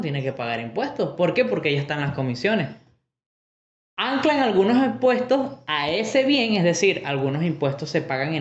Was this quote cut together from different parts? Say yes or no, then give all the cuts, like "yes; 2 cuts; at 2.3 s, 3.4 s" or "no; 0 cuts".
no; 0 cuts